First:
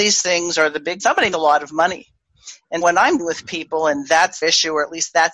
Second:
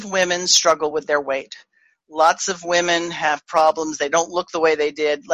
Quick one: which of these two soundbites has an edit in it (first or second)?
first